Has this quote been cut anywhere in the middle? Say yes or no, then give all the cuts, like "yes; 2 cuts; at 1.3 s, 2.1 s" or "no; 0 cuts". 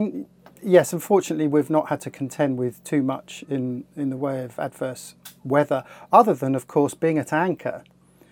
no; 0 cuts